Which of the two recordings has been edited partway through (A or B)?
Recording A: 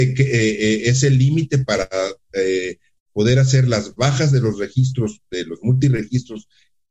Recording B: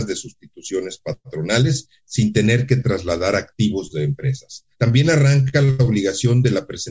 B